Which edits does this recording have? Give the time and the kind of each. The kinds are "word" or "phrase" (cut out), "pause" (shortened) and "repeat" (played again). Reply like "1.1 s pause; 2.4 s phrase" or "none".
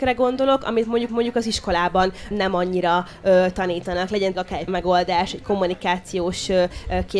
1.1 s repeat; 2.3 s word; 4.3 s word; 4.7 s word

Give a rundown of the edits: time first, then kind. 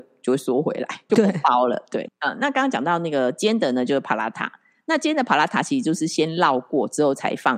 1.1 s word; 2.0 s word

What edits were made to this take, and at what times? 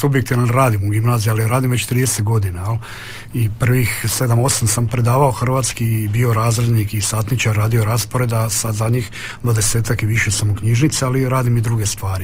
none

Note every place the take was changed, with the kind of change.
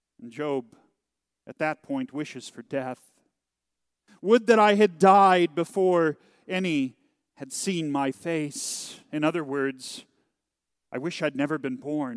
none

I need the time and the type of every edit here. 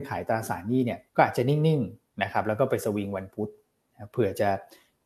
1.1 s pause

